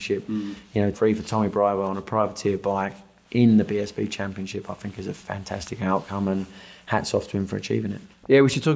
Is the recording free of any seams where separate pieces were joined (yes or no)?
no